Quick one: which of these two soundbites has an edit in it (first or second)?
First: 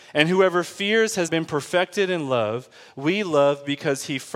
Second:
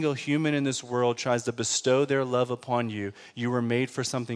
first